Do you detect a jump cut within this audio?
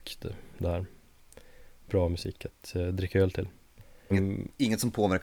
yes; 1 cut; at 4.1 s

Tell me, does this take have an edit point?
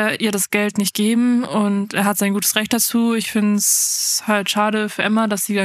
no; 0 cuts

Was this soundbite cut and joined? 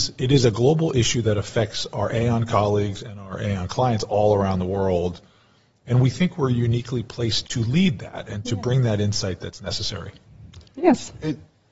yes; 1 cut; at 7.4 s

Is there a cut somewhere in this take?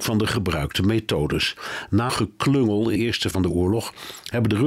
yes; 3 cuts; at 2.1 s, 3.0 s, 3.3 s

